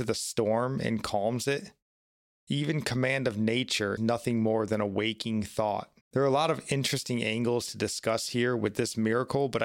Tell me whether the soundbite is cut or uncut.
cut